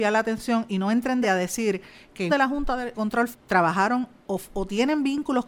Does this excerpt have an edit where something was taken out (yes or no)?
yes